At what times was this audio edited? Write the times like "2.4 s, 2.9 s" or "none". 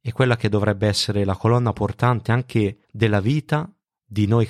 2.8 s